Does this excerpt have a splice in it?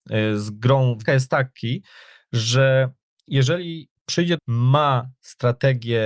yes; 2 cuts; at 1.0 s, 4.4 s

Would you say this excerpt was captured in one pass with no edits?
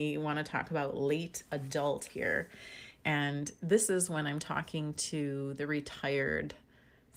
no; 1 cut; at 2.1 s

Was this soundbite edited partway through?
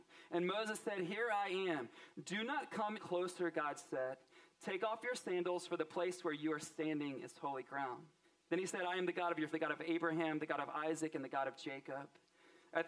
yes; 3 cuts; at 3.0 s, 8.2 s, 9.5 s

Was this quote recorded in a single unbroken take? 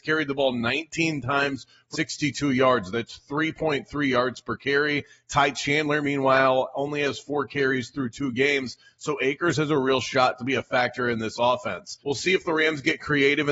no; 2 cuts; at 1.9 s, 12.0 s

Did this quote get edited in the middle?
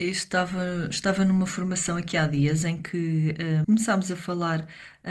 yes; 1 cut; at 3.6 s

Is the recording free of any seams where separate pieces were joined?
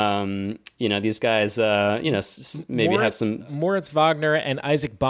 no; 1 cut; at 3.5 s

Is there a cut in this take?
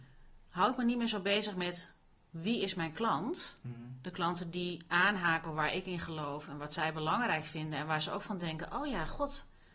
no; 0 cuts

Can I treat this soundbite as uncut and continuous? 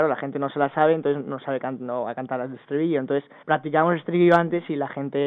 no; 1 cut; at 3.4 s

